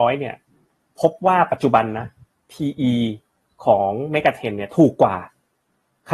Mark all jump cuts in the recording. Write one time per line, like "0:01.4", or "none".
none